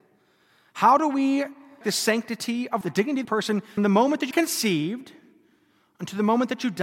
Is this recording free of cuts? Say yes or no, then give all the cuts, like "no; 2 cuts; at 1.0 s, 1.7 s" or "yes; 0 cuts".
no; 5 cuts; at 1.8 s, 2.8 s, 3.2 s, 3.8 s, 4.3 s